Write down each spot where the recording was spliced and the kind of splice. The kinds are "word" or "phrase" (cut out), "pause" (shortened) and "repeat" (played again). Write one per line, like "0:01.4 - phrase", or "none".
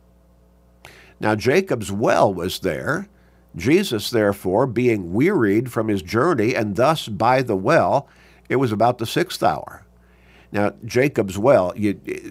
none

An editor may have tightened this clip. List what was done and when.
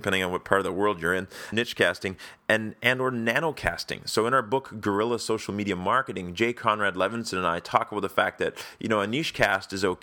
0:01.5 - phrase

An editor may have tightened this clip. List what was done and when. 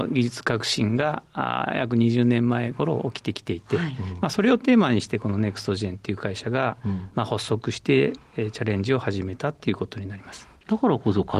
none

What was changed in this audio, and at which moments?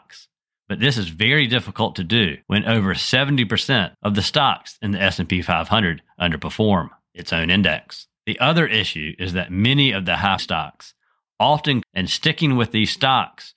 0:02.4 - pause
0:03.9 - pause
0:08.2 - pause
0:10.4 - word
0:11.8 - phrase

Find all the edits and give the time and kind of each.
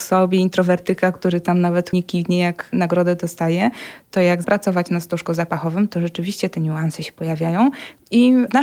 0:01.9 - word
0:04.4 - word

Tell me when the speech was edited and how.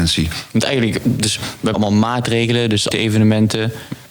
0:01.7 - word
0:02.9 - phrase

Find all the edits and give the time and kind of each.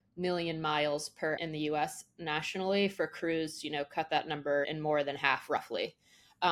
0:01.4 - word
0:04.6 - word

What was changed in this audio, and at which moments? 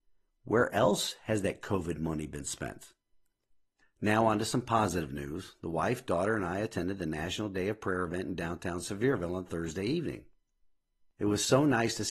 none

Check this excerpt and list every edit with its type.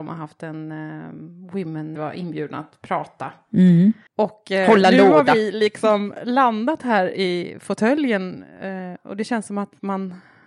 0:02.0 - phrase
0:04.1 - pause

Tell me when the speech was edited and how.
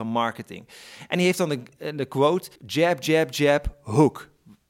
0:02.6 - pause

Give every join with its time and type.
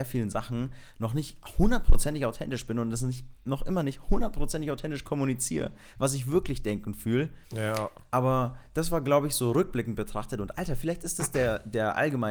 0:07.4 - pause

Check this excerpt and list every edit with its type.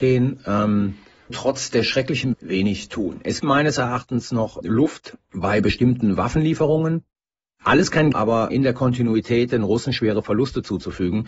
0:01.3 - word
0:02.3 - word
0:03.4 - word
0:04.6 - word
0:08.1 - word
0:08.5 - word

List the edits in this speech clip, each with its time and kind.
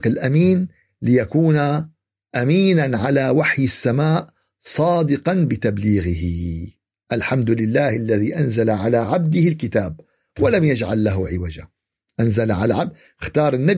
none

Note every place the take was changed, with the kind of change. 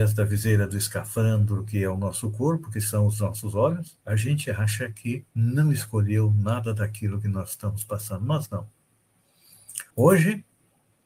0:04.0 - pause
0:05.3 - pause
0:09.9 - pause

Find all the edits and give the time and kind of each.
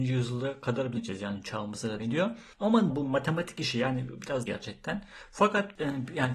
0:01.0 - phrase
0:02.0 - word
0:02.9 - word
0:04.5 - phrase

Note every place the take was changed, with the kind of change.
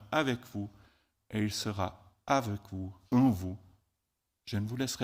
0:03.0 - pause

